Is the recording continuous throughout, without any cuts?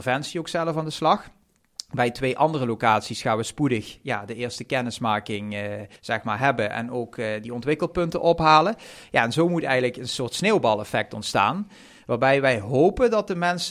no; 1 cut; at 6.0 s

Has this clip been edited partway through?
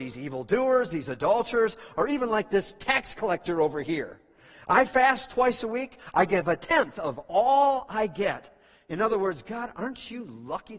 no; 0 cuts

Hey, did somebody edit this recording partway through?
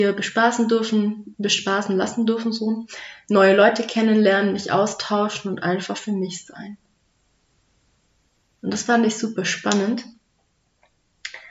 no; 0 cuts

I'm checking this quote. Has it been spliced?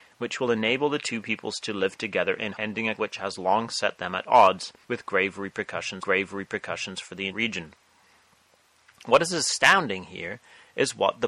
yes; 5 cuts; at 2.5 s, 3.0 s, 4.8 s, 6.0 s, 7.3 s

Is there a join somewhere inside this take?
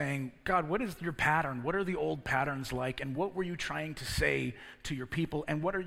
no; 0 cuts

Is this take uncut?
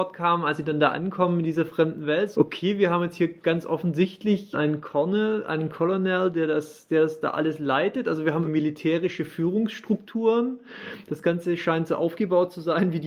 no; 3 cuts; at 2.3 s, 4.5 s, 8.4 s

